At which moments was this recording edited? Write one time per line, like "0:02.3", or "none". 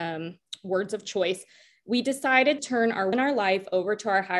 0:02.6
0:03.1

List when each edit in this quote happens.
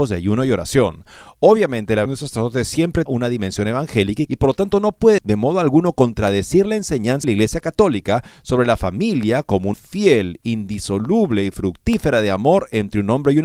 0:02.1
0:03.1
0:04.3
0:05.2
0:07.2
0:09.7

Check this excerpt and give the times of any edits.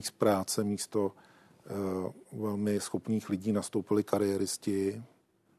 0:02.2

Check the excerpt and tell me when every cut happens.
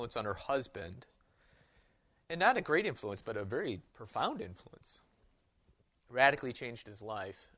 0:03.9

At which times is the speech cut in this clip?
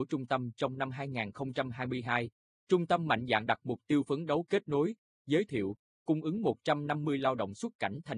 none

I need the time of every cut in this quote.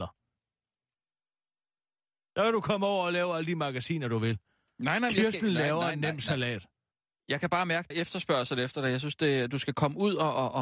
0:06.9
0:07.9

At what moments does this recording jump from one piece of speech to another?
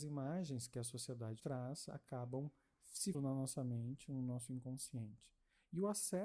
0:01.4
0:03.1

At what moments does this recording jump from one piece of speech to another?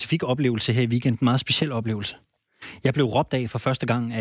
none

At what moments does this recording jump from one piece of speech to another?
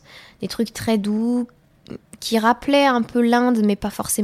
none

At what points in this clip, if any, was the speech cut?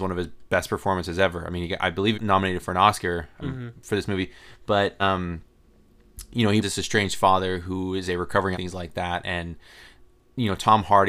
0:02.1
0:03.4
0:05.0
0:06.6
0:08.5

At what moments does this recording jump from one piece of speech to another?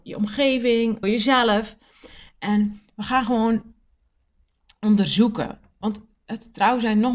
0:01.0

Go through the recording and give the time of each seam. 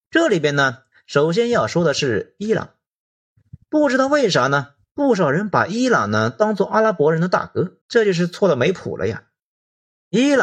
0:03.6
0:07.8

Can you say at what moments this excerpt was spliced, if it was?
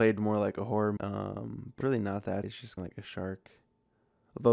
0:01.0
0:01.8
0:02.4
0:02.8

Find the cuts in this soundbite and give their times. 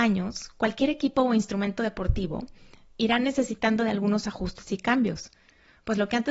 none

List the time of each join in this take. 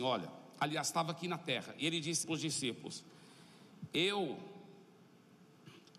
0:02.2

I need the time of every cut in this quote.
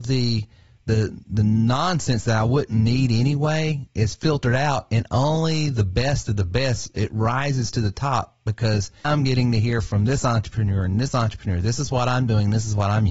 0:09.0

